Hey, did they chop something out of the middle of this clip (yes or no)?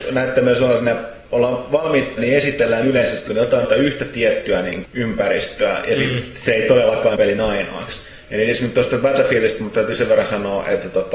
yes